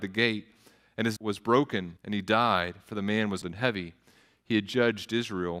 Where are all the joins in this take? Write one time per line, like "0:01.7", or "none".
0:01.2
0:02.0
0:03.4